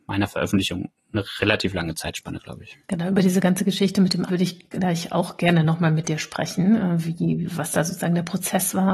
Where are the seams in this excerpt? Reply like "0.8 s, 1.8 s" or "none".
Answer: 2.8 s, 4.3 s